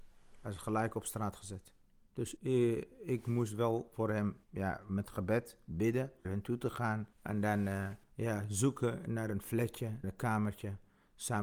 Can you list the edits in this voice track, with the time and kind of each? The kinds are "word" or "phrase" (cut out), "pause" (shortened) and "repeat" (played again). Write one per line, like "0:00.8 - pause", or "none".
0:02.4 - word
0:04.4 - pause
0:06.2 - word
0:07.1 - pause
0:08.0 - pause
0:10.0 - word